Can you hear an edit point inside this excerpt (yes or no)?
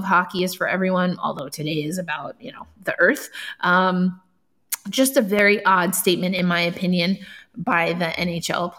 no